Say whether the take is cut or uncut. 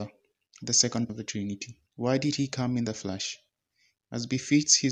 cut